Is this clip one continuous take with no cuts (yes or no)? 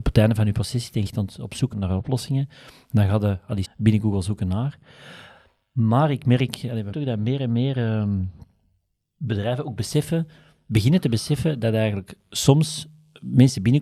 no